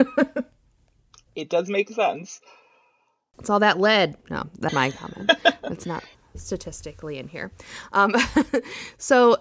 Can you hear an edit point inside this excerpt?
yes; 2 cuts; at 4.7 s, 6.1 s

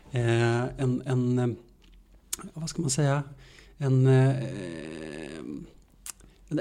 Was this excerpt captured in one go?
yes; 0 cuts

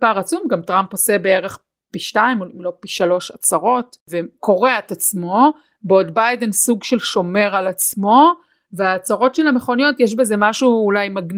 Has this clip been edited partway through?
no; 0 cuts

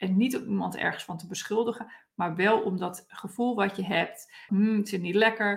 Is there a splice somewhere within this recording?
yes; 1 cut; at 4.5 s

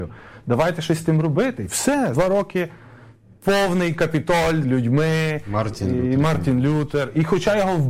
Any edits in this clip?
yes; 2 cuts; at 2.1 s, 4.6 s

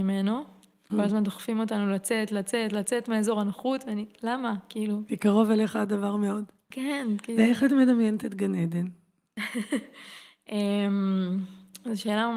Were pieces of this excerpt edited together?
no; 0 cuts

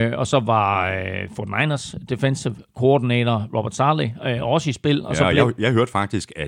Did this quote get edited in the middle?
no; 0 cuts

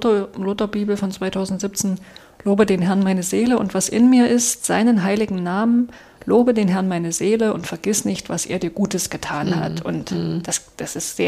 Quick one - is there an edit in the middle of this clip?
no; 0 cuts

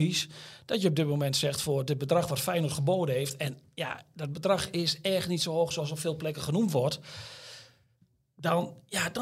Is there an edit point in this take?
no; 0 cuts

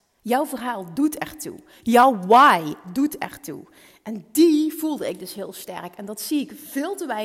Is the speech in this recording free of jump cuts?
yes; 0 cuts

